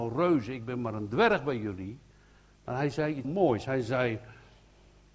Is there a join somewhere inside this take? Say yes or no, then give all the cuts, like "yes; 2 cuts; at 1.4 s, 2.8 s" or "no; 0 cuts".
yes; 1 cut; at 3.2 s